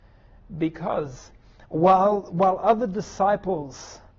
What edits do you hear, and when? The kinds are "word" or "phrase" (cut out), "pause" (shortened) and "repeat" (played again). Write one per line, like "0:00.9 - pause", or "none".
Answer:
none